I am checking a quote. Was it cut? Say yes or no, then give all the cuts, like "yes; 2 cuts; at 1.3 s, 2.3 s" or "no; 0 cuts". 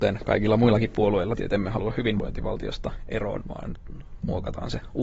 yes; 2 cuts; at 1.4 s, 3.4 s